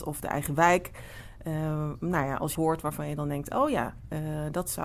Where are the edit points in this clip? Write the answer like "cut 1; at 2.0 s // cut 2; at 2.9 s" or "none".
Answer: cut 1; at 2.5 s